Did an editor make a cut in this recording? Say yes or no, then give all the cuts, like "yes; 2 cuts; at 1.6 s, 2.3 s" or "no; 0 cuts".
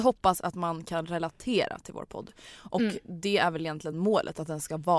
no; 0 cuts